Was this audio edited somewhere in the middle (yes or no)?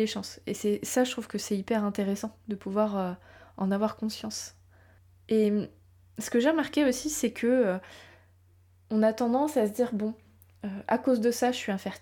no